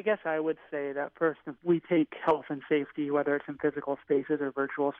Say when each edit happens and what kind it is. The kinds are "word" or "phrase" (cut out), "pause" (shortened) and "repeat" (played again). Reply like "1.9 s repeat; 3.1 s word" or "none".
1.6 s phrase